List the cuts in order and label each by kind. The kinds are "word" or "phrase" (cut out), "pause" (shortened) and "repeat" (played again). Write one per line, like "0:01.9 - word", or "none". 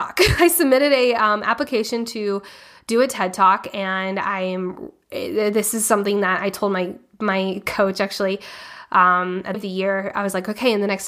0:09.5 - phrase